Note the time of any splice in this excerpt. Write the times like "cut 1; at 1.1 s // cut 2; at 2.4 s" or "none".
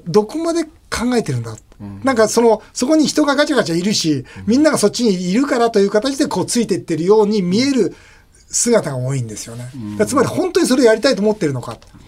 none